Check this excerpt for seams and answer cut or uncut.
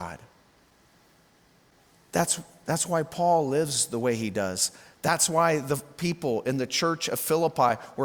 uncut